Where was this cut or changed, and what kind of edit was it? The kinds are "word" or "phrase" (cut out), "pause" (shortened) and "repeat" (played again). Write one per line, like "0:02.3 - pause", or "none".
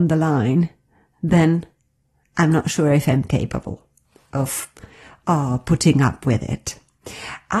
none